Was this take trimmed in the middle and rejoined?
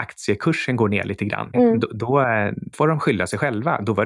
yes; 2 cuts; at 1.5 s, 2.7 s

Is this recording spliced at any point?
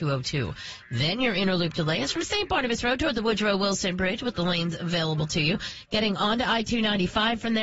no; 0 cuts

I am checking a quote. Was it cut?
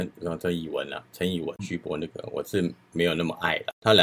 yes; 1 cut; at 1.6 s

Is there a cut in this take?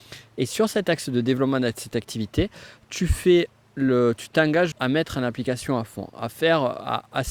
yes; 1 cut; at 4.7 s

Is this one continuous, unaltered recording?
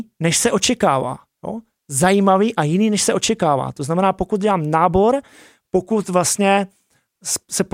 yes; 0 cuts

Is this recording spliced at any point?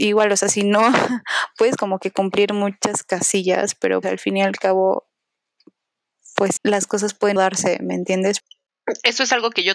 yes; 3 cuts; at 4.0 s, 6.6 s, 7.4 s

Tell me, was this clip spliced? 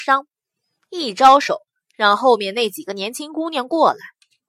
no; 0 cuts

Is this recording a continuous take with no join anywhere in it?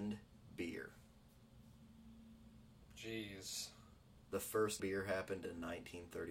no; 1 cut; at 4.8 s

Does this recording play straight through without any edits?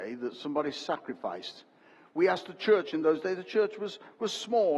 yes; 0 cuts

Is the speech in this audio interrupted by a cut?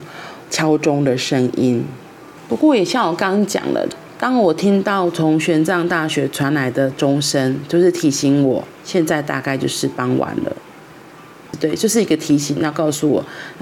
yes; 2 cuts; at 2.4 s, 8.7 s

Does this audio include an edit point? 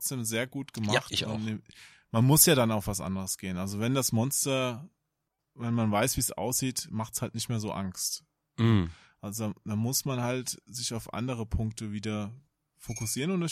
no; 0 cuts

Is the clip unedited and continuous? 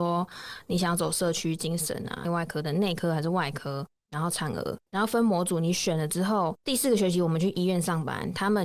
no; 1 cut; at 2.2 s

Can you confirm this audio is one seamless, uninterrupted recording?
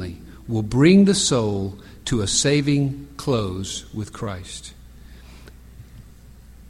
yes; 0 cuts

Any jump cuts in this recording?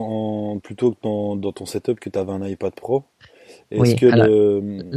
no; 0 cuts

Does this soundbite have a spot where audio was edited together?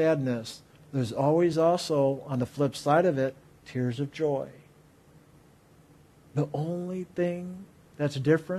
no; 0 cuts

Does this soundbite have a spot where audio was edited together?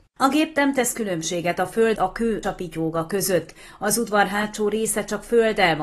yes; 2 cuts; at 2.0 s, 2.4 s

